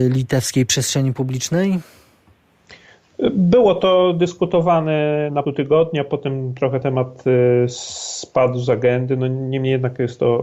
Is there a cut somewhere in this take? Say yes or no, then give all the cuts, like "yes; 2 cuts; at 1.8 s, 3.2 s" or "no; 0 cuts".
yes; 2 cuts; at 5.4 s, 6.8 s